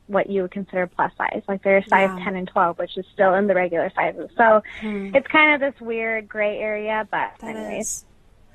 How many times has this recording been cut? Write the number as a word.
zero